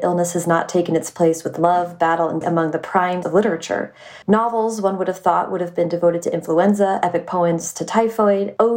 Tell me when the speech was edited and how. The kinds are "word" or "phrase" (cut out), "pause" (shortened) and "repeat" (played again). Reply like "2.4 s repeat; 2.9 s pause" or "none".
2.4 s word; 3.2 s word; 4.2 s pause